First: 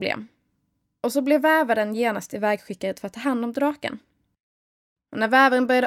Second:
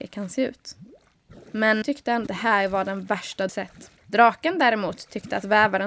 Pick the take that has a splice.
second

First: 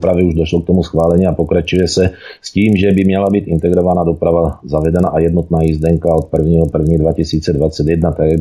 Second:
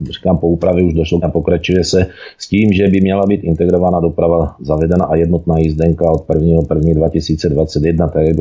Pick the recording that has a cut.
second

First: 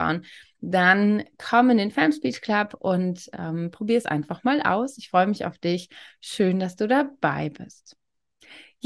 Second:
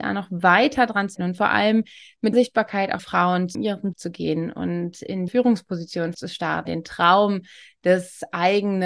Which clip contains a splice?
second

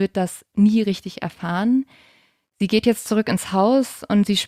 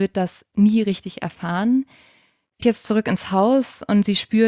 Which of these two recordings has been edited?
second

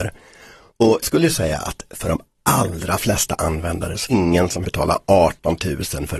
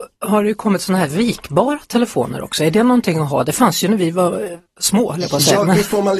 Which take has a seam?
first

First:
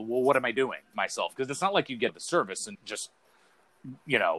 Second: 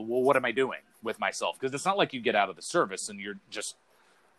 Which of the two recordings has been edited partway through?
first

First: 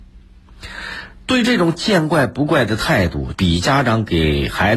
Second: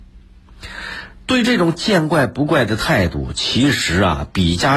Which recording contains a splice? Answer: first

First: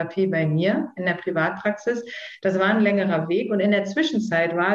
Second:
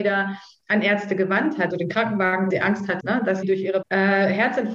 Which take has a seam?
second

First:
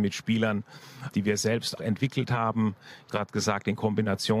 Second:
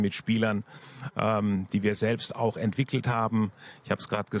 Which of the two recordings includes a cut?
first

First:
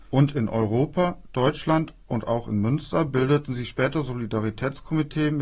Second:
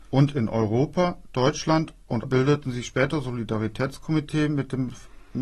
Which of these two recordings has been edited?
second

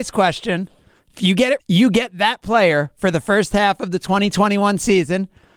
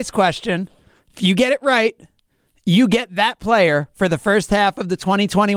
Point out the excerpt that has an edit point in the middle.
first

